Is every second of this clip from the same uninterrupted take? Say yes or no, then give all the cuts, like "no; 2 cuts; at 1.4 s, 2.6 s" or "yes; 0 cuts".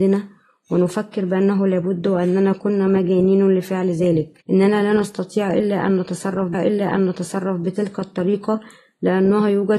no; 2 cuts; at 4.4 s, 6.5 s